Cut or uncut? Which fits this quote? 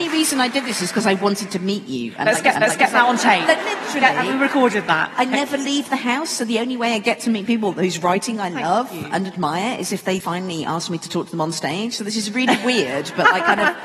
cut